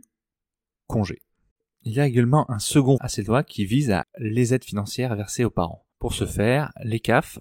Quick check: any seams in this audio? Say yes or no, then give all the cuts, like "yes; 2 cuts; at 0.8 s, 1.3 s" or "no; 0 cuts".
yes; 4 cuts; at 1.5 s, 3.0 s, 4.0 s, 5.9 s